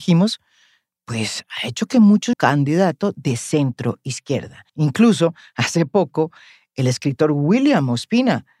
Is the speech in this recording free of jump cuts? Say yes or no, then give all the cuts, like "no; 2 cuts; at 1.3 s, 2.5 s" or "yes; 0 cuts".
no; 2 cuts; at 2.3 s, 4.7 s